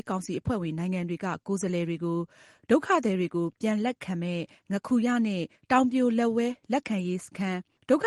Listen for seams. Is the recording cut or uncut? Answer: uncut